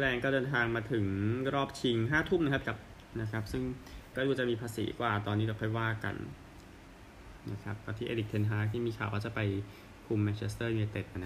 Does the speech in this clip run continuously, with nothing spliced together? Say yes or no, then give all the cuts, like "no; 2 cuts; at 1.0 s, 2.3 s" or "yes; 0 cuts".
no; 3 cuts; at 2.6 s, 3.1 s, 4.1 s